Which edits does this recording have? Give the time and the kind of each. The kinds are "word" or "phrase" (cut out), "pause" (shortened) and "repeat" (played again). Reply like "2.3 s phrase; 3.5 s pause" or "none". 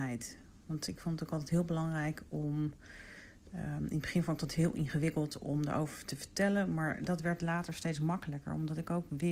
none